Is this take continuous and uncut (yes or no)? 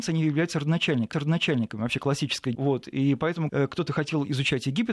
no